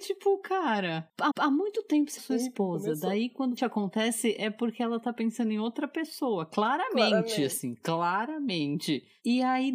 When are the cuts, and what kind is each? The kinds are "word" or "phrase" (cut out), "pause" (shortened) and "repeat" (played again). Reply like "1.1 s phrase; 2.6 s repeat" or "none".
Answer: 1.3 s repeat; 2.2 s phrase; 3.6 s word